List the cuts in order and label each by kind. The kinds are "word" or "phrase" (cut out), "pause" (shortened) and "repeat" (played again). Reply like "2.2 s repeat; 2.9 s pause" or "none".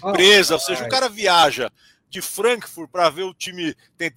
none

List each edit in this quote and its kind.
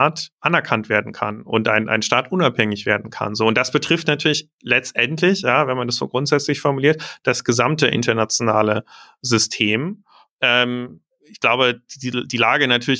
none

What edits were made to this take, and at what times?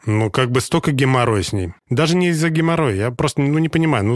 1.8 s pause

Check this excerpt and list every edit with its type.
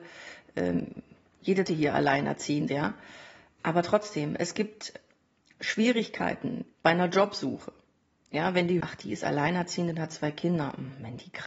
1.7 s word; 2.7 s word; 6.7 s word; 8.8 s word

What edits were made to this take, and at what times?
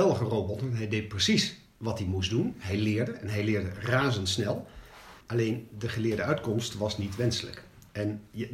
5.2 s pause

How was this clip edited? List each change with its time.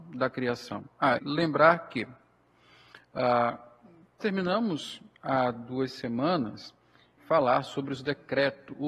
1.2 s word; 4.2 s word; 7.2 s word

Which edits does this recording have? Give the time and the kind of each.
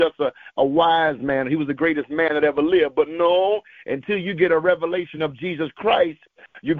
none

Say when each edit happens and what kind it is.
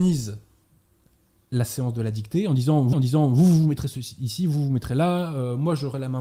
2.9 s repeat

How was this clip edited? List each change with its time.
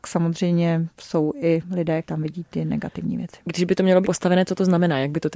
2.0 s word; 4.0 s phrase

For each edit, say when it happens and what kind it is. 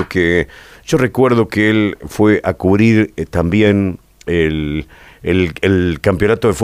none

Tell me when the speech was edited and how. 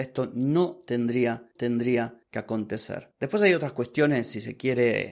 1.6 s repeat

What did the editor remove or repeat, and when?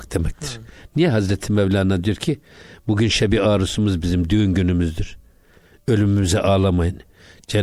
none

